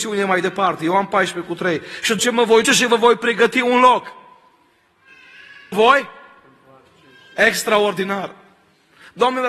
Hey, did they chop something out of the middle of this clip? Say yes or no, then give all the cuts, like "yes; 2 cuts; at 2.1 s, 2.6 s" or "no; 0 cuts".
yes; 3 cuts; at 2.2 s, 2.6 s, 5.7 s